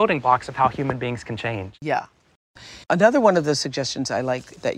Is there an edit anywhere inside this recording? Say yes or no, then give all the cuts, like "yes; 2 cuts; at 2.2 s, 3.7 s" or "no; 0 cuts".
yes; 1 cut; at 2.8 s